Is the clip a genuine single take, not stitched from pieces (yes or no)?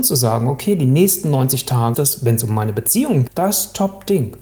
no